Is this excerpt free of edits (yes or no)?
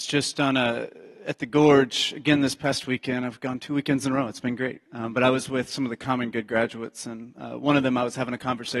yes